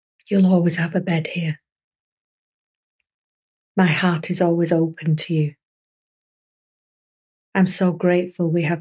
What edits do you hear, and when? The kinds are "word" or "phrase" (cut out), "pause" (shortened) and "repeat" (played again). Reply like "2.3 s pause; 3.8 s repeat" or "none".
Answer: none